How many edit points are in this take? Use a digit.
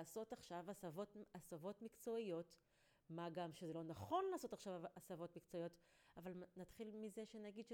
0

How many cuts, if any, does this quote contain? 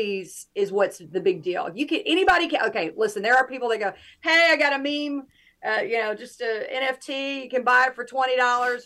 0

